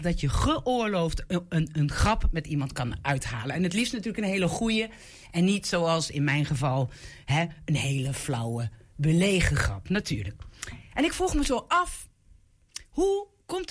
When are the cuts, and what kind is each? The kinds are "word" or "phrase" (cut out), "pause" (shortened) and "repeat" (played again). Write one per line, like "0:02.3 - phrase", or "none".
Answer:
none